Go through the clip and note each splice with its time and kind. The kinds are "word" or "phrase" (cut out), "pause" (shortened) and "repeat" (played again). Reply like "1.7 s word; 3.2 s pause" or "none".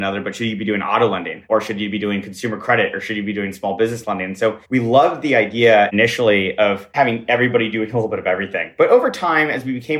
4.6 s pause